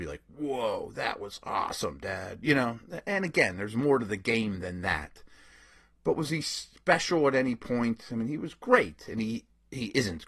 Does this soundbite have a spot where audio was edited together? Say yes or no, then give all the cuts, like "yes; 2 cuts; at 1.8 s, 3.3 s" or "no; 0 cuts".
no; 0 cuts